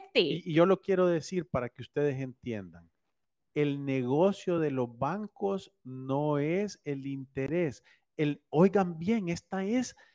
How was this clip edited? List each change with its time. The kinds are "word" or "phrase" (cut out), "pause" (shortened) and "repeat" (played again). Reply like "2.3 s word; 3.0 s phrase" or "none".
none

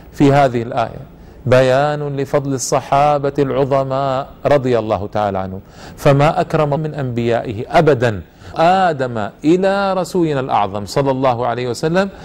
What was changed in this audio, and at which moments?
6.8 s phrase; 8.5 s word

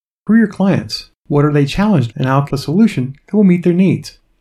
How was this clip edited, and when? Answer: 1.2 s pause; 2.1 s word; 2.5 s phrase

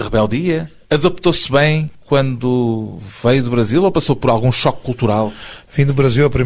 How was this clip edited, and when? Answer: none

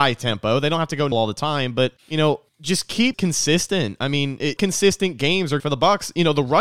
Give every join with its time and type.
1.1 s word; 2.0 s pause; 2.5 s pause; 3.1 s word; 4.6 s word; 5.6 s phrase

